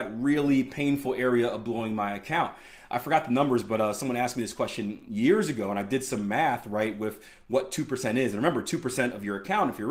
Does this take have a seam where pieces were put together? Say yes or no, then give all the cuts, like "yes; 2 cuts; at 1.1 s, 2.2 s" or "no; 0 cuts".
no; 0 cuts